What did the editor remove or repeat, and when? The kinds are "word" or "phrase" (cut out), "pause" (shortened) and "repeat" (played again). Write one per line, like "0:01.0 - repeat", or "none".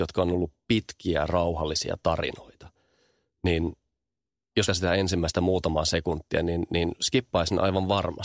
0:04.7 - phrase

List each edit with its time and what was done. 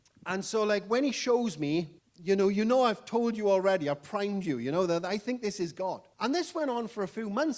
0:02.0 - pause
0:06.1 - pause

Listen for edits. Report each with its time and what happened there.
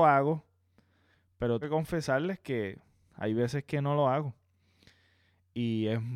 0:01.6 - word

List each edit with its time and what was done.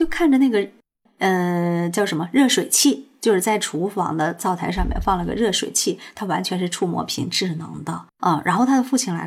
0:08.1 - pause

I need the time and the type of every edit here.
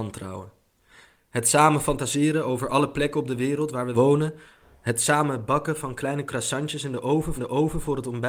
0:03.9 - phrase
0:07.4 - repeat

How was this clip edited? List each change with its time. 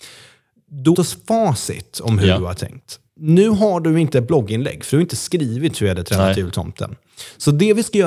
0:00.9 - phrase
0:03.1 - pause

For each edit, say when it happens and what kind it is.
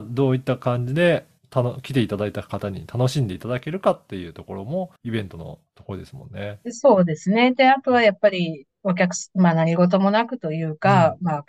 0:05.0 - pause
0:05.7 - pause

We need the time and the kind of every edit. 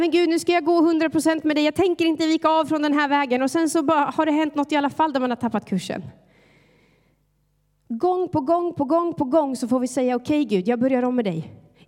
none

